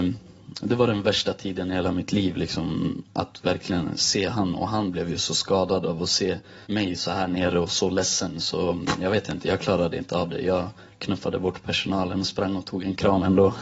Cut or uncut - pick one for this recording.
cut